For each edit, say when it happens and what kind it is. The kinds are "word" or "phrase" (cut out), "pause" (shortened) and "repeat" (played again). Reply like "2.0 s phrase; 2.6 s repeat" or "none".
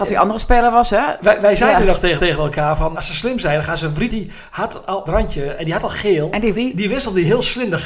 2.2 s repeat; 2.9 s word; 4.1 s phrase; 5.1 s phrase; 6.5 s word